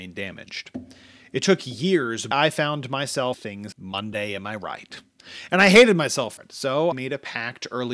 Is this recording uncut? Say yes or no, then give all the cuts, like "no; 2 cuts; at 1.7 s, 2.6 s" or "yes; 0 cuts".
no; 5 cuts; at 2.3 s, 3.3 s, 3.7 s, 6.4 s, 6.9 s